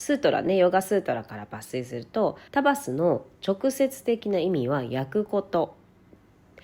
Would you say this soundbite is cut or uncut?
cut